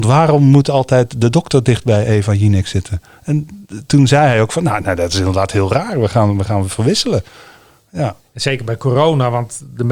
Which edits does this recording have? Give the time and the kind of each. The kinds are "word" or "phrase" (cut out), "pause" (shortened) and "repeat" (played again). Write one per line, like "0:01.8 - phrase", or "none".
none